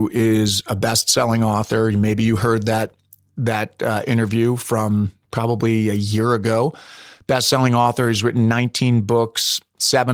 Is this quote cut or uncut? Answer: uncut